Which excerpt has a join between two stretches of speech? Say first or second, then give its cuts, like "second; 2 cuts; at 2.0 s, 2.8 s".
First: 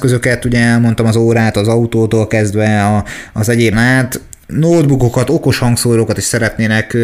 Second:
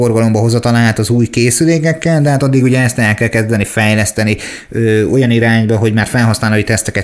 first; 1 cut; at 3.7 s